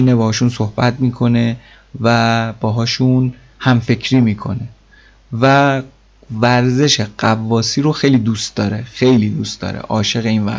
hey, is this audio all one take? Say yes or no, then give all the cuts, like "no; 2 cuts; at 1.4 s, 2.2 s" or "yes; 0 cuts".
yes; 0 cuts